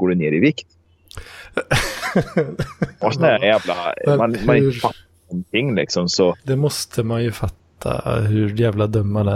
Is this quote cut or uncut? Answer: cut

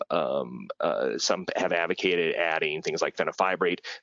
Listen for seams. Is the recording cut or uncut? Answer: uncut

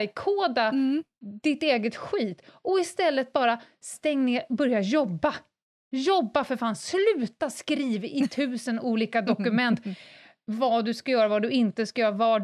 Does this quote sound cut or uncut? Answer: uncut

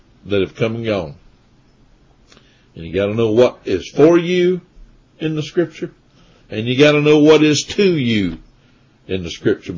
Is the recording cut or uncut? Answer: uncut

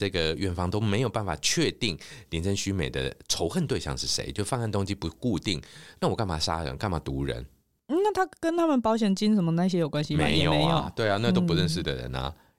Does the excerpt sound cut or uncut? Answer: uncut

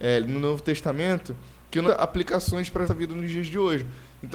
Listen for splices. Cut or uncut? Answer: cut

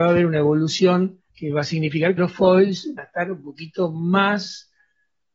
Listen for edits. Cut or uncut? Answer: cut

